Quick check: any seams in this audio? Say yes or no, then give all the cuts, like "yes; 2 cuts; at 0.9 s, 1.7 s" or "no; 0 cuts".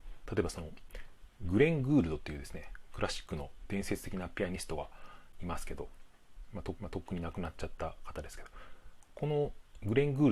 yes; 1 cut; at 6.8 s